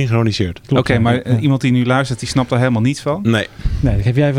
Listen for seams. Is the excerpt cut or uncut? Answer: uncut